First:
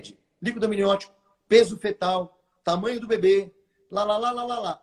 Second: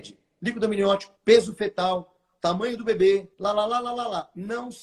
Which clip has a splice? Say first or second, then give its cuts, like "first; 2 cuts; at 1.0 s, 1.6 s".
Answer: second; 2 cuts; at 1.2 s, 3.3 s